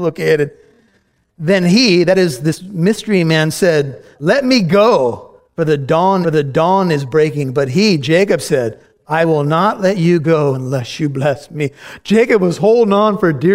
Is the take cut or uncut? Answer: cut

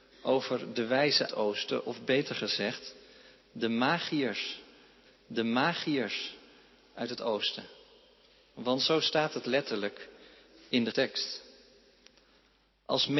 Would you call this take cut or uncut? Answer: cut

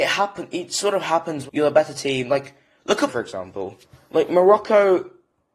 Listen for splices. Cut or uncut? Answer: cut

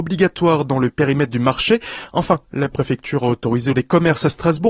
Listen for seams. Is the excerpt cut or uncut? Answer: cut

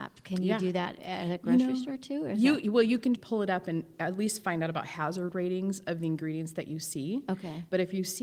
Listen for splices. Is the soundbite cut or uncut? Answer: cut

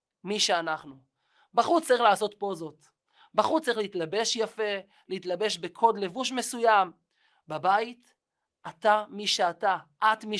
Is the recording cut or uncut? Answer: uncut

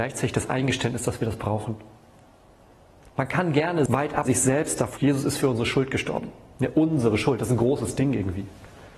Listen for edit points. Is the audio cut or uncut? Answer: cut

